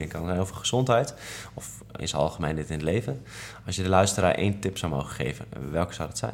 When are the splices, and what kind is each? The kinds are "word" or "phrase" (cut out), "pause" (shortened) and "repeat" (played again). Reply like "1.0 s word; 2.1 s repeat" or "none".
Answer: 2.0 s word